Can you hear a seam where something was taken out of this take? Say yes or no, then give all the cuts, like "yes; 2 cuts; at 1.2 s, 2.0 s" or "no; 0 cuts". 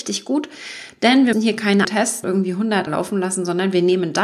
yes; 4 cuts; at 1.3 s, 1.8 s, 2.2 s, 2.9 s